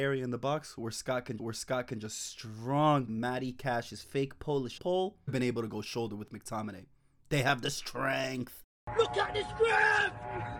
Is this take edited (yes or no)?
yes